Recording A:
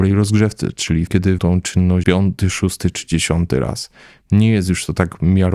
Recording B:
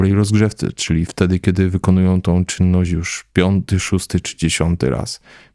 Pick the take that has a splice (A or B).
A